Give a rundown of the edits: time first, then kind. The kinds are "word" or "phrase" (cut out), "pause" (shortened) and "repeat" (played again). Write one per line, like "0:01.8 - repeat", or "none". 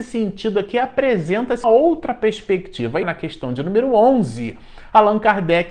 0:01.6 - word
0:03.0 - word